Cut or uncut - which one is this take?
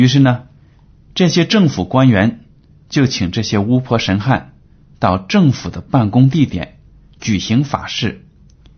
uncut